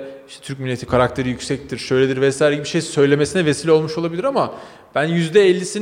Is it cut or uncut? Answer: uncut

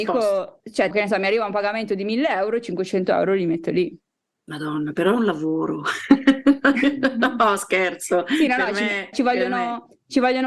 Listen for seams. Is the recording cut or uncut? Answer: cut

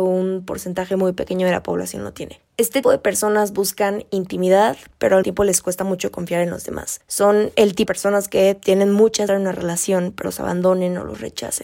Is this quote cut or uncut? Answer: cut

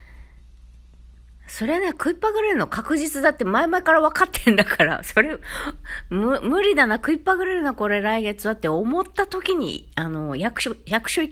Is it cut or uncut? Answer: uncut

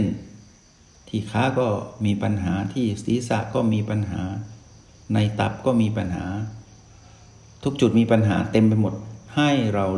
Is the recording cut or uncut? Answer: uncut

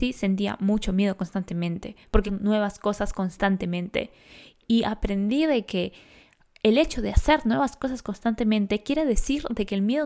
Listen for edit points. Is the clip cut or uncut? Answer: cut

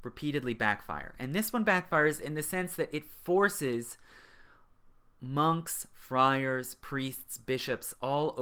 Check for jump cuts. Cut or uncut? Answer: uncut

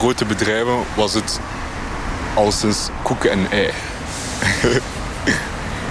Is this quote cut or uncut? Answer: uncut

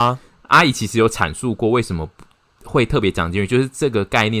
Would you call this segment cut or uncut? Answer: uncut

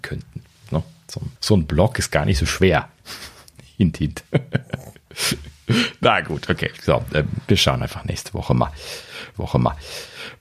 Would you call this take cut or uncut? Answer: cut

